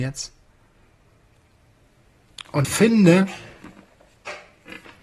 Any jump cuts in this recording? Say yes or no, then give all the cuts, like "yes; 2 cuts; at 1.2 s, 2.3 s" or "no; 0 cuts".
yes; 1 cut; at 2.6 s